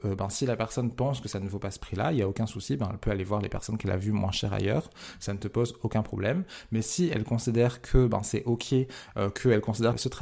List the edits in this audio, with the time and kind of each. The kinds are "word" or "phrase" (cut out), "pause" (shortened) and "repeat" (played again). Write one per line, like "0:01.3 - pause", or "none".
none